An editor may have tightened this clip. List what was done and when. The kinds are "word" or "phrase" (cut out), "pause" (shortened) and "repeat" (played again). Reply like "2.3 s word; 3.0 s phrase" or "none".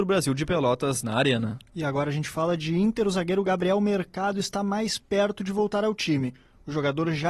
none